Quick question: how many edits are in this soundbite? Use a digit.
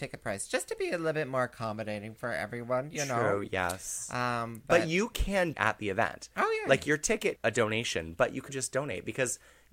3